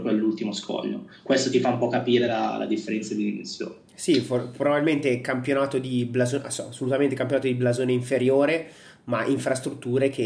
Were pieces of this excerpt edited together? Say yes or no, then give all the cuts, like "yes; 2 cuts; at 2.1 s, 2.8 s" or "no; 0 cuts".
no; 0 cuts